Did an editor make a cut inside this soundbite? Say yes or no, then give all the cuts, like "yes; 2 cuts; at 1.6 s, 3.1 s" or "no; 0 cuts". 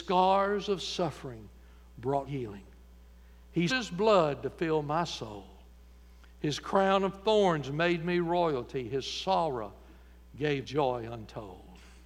yes; 3 cuts; at 2.3 s, 3.7 s, 10.6 s